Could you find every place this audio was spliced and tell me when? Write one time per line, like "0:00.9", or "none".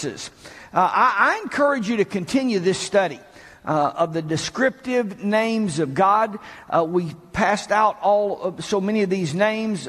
none